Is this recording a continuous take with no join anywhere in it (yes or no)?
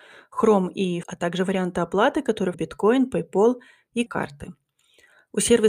no